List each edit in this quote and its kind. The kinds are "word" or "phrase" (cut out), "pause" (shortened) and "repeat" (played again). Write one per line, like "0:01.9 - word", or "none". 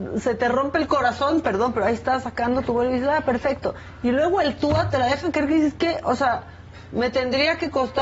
none